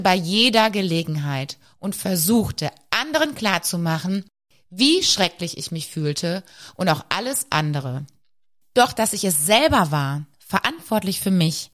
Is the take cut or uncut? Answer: uncut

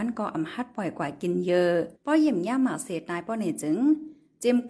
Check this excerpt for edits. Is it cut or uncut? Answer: cut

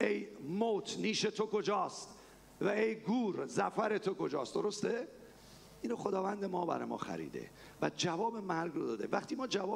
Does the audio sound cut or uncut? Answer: uncut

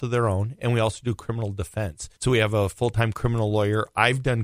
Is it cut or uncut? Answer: cut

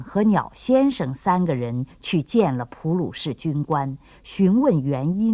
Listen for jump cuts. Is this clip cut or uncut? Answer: uncut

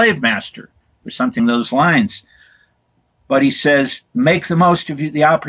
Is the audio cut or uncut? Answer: cut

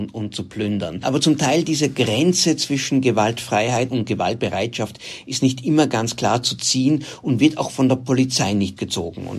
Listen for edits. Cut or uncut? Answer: uncut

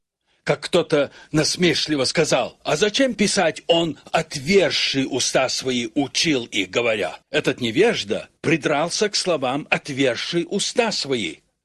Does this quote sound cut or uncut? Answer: cut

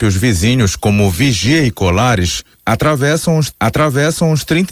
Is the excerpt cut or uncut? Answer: cut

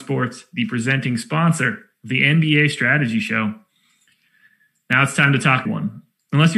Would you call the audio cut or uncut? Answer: cut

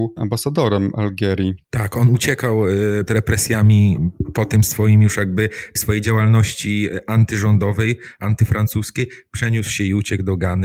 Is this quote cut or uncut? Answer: cut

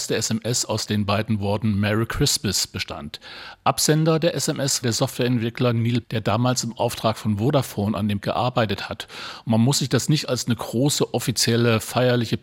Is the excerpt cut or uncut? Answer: cut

